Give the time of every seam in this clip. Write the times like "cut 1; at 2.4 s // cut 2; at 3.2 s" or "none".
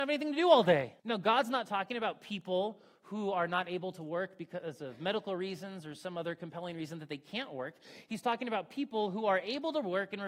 cut 1; at 1.0 s

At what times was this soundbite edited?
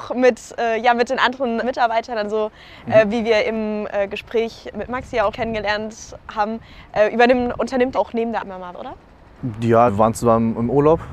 cut 1; at 1.6 s // cut 2; at 4.7 s // cut 3; at 5.3 s // cut 4; at 7.6 s // cut 5; at 7.9 s // cut 6; at 8.4 s // cut 7; at 8.7 s // cut 8; at 9.9 s

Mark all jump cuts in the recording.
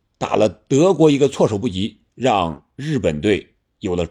cut 1; at 2.1 s

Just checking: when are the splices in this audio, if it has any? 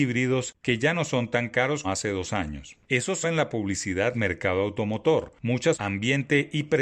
cut 1; at 1.8 s // cut 2; at 3.2 s // cut 3; at 4.1 s // cut 4; at 5.7 s

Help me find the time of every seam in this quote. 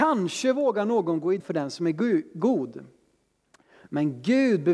cut 1; at 1.4 s

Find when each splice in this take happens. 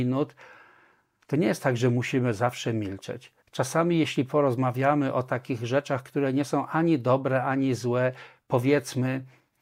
cut 1; at 3.4 s

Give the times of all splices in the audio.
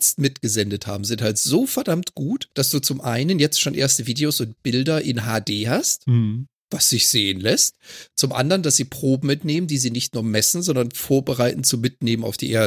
cut 1; at 2.5 s

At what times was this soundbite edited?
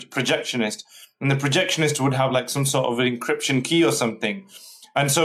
none

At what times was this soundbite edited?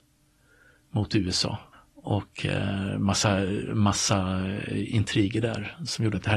cut 1; at 1.7 s

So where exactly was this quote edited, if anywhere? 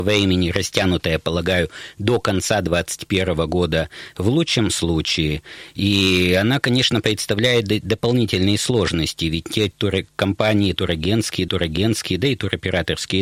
cut 1; at 11.5 s

